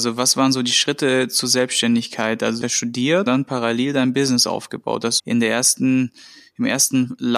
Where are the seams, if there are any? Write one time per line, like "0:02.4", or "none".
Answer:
0:02.6
0:03.3
0:05.2